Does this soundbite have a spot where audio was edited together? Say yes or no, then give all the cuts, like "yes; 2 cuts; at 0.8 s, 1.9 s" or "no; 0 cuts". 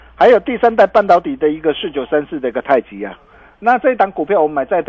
no; 0 cuts